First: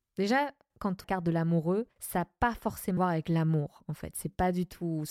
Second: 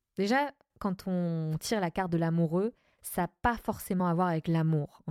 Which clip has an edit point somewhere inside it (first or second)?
first